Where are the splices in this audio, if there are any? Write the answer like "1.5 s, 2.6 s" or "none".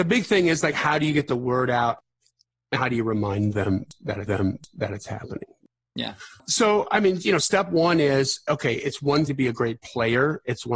2.8 s, 4.3 s, 9.3 s